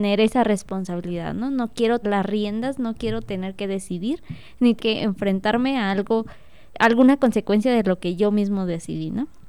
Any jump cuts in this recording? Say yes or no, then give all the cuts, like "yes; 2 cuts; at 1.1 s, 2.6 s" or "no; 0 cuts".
yes; 3 cuts; at 2.0 s, 4.8 s, 6.7 s